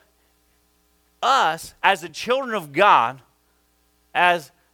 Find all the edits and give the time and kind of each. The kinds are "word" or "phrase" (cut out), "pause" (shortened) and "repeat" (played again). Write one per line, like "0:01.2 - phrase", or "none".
none